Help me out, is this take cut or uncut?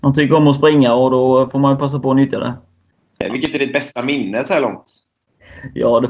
uncut